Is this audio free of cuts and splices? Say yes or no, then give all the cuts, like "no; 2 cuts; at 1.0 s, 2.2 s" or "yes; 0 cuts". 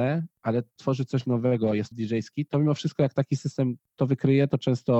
no; 1 cut; at 1.9 s